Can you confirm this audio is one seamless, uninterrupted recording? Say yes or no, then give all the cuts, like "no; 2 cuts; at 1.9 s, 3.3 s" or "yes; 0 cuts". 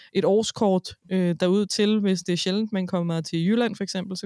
yes; 0 cuts